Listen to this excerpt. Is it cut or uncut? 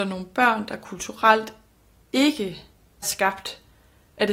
cut